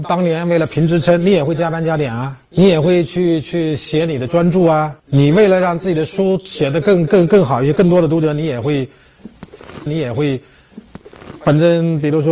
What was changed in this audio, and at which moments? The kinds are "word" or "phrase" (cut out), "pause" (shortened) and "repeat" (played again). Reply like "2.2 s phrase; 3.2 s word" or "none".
2.4 s pause; 5.0 s pause; 9.9 s repeat